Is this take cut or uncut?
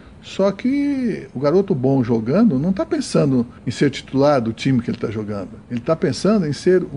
cut